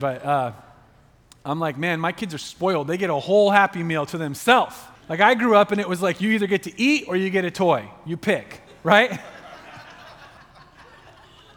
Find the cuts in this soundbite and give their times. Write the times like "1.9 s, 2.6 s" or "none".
5.0 s, 10.4 s